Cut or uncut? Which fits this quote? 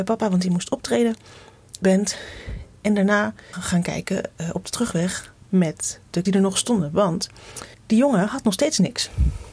cut